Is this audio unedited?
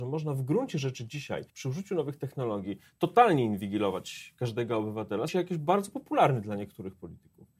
no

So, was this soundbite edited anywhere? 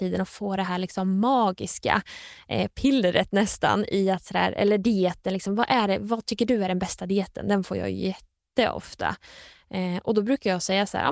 no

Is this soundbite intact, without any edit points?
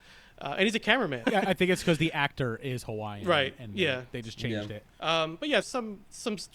no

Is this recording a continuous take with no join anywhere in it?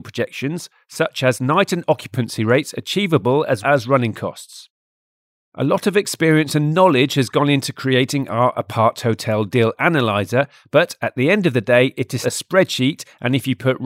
no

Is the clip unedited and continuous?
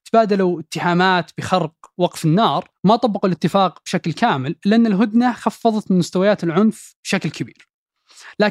yes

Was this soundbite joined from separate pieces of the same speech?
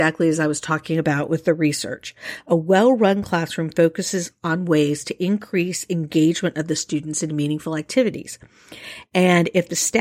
no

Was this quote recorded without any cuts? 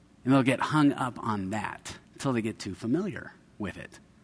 no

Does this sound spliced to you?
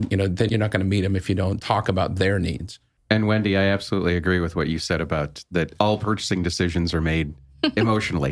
no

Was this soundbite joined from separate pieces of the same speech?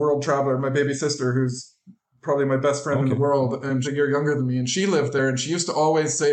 yes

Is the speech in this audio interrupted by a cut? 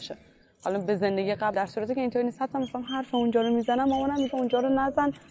yes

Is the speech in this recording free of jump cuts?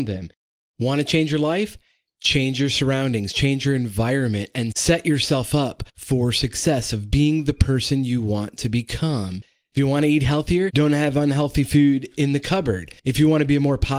no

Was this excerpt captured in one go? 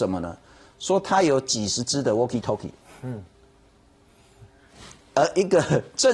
yes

